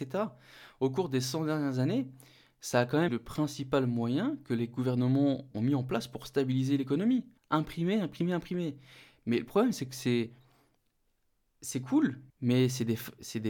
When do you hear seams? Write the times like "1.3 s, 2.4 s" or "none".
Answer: 3.1 s, 5.5 s, 7.4 s, 12.3 s